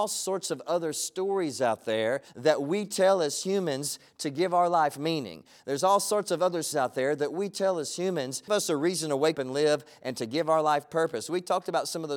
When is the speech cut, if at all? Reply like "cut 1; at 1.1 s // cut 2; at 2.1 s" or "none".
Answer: cut 1; at 2.3 s // cut 2; at 6.7 s // cut 3; at 8.5 s // cut 4; at 9.3 s